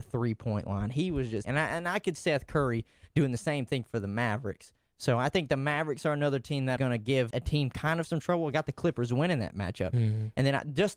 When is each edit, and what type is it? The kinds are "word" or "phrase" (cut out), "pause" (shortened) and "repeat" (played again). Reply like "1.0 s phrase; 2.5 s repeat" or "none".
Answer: 1.4 s word; 2.2 s word; 6.8 s word; 7.3 s word